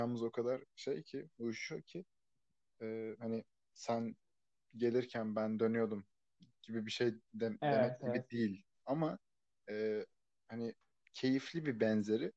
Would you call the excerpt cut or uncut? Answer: uncut